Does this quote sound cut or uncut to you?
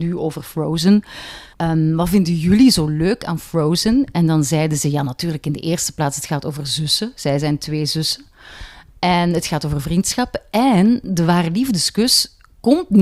cut